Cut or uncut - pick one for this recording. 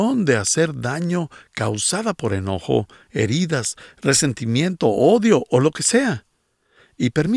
uncut